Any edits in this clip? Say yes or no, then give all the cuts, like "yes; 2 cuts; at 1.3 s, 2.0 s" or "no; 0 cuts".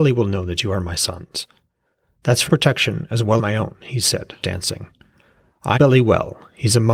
yes; 4 cuts; at 2.5 s, 3.4 s, 4.4 s, 5.7 s